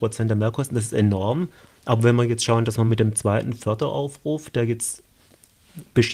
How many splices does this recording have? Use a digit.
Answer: 0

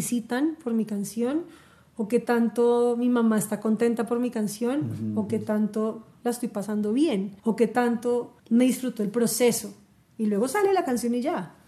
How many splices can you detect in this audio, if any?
2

